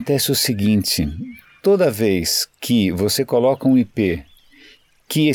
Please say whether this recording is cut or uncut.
uncut